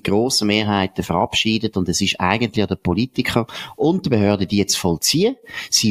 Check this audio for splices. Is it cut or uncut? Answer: uncut